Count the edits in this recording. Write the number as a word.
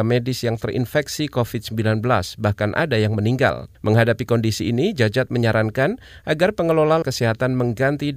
two